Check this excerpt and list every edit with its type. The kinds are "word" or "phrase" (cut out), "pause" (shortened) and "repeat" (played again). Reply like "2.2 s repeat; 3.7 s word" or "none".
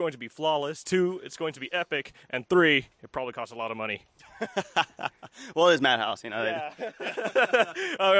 2.2 s pause